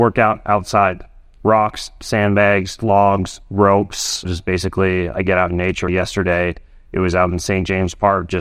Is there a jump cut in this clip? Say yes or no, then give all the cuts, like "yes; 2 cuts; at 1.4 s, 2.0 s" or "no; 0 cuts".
no; 0 cuts